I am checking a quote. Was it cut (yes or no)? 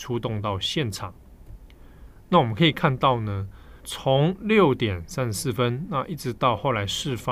yes